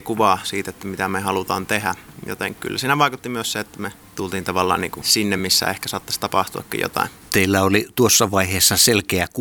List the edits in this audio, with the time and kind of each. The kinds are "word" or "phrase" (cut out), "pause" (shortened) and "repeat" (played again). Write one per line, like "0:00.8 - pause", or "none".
none